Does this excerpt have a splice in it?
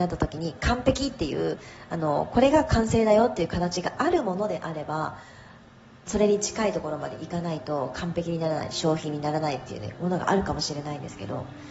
no; 0 cuts

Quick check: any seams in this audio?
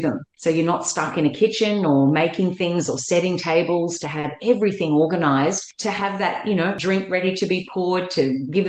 no; 0 cuts

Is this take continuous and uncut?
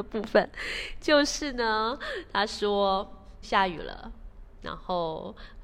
no; 1 cut; at 3.4 s

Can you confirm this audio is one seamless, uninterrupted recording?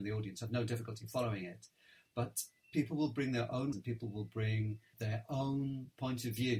no; 2 cuts; at 3.7 s, 4.9 s

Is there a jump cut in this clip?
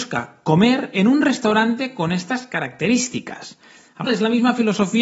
yes; 1 cut; at 4.1 s

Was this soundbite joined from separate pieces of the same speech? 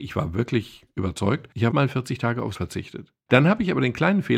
yes; 2 cuts; at 1.7 s, 2.5 s

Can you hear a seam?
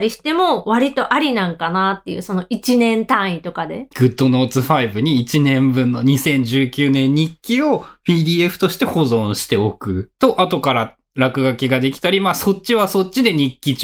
yes; 2 cuts; at 3.9 s, 10.1 s

